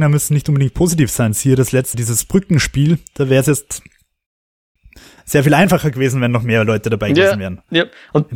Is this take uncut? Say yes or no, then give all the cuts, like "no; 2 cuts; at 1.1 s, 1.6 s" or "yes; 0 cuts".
no; 1 cut; at 1.9 s